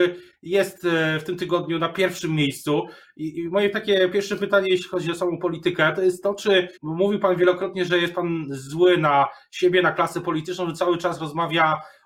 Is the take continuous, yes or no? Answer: no